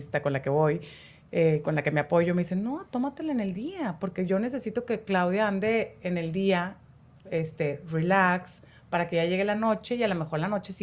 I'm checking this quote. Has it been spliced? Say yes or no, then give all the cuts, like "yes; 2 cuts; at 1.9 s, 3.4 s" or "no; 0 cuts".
no; 0 cuts